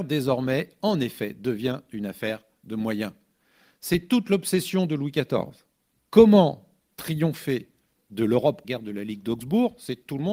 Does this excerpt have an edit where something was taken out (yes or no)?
yes